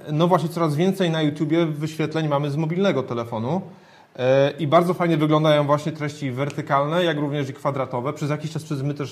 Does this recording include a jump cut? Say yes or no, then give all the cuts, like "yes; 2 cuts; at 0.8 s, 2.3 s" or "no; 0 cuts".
no; 0 cuts